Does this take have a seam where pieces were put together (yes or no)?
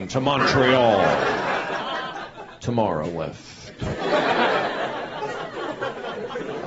yes